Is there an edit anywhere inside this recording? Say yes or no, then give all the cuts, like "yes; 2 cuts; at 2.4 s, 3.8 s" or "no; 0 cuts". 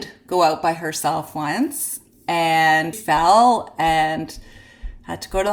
yes; 1 cut; at 2.9 s